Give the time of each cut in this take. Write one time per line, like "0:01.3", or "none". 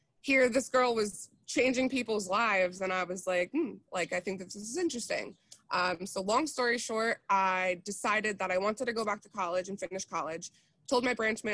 none